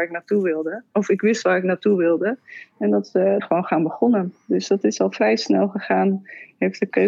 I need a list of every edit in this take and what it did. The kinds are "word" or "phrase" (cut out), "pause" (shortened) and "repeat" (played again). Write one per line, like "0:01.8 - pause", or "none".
0:03.4 - phrase